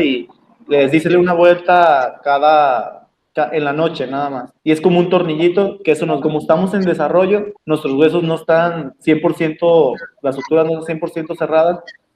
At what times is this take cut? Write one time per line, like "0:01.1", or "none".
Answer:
0:01.1
0:03.1
0:04.6
0:06.2
0:07.6